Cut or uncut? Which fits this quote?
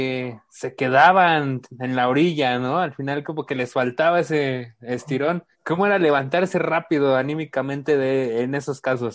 cut